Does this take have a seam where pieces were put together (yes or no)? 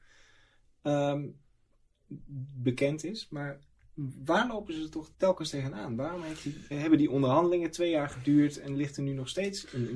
yes